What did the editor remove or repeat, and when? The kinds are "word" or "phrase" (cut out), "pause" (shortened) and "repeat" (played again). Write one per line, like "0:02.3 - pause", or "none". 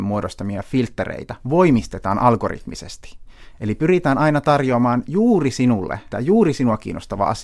0:06.1 - word